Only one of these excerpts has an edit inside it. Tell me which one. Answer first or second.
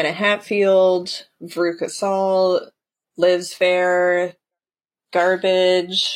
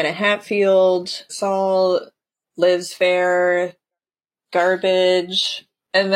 second